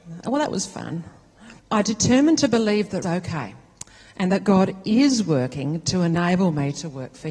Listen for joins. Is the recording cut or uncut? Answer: cut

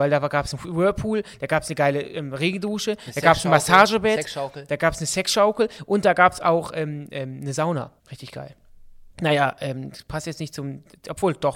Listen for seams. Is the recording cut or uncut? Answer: cut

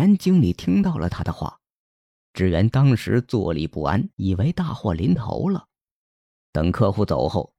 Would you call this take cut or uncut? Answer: cut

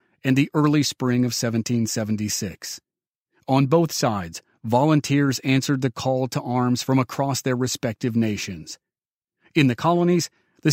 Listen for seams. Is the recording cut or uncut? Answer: uncut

